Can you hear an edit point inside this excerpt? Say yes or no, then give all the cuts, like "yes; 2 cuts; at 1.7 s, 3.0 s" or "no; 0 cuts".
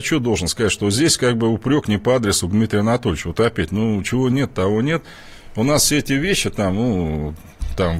no; 0 cuts